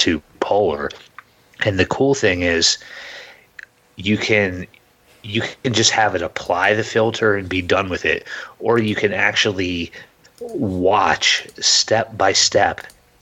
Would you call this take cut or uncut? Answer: uncut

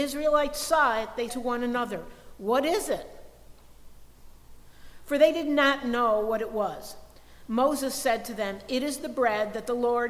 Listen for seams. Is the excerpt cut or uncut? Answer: cut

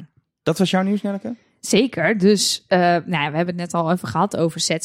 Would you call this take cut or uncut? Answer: uncut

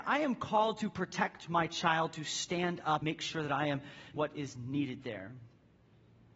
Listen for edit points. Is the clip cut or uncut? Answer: cut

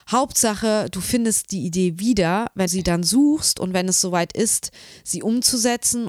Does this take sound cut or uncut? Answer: cut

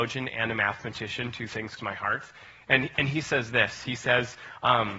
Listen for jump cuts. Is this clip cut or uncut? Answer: cut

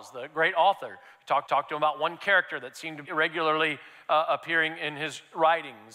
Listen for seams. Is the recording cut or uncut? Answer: cut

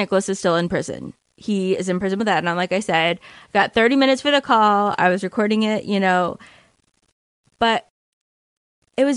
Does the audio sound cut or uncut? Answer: uncut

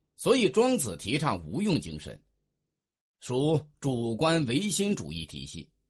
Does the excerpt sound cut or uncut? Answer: uncut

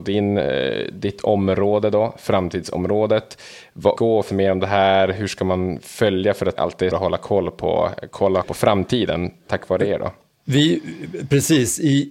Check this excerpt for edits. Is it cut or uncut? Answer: cut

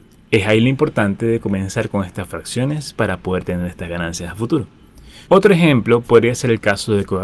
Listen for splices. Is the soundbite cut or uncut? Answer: cut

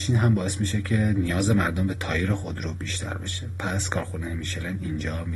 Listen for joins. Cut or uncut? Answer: uncut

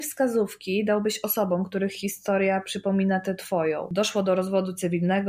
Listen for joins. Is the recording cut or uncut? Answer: uncut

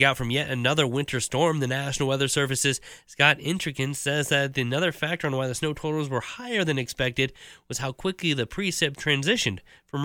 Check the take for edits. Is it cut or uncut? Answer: uncut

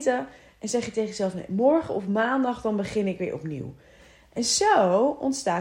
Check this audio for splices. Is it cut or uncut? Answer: uncut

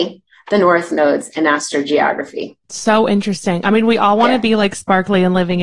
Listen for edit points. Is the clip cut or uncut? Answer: cut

